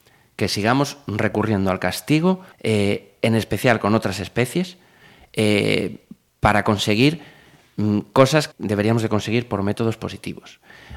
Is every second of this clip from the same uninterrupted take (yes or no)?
no